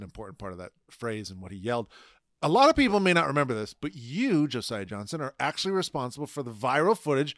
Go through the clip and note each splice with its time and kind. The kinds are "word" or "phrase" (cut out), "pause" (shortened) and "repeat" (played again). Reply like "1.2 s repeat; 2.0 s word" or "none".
none